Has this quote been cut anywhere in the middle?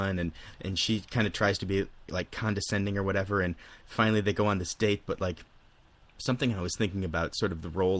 no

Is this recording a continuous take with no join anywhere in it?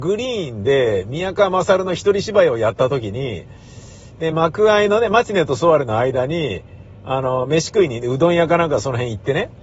yes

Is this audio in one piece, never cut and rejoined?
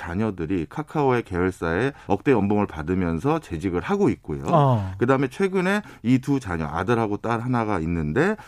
no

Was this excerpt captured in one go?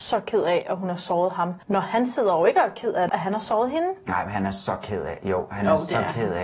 no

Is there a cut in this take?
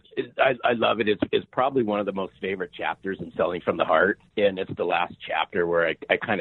yes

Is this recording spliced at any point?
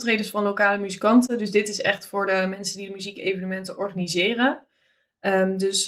no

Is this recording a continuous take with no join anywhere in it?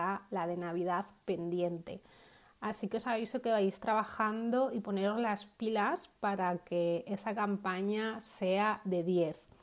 yes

